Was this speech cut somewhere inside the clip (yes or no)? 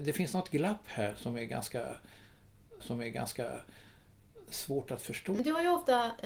yes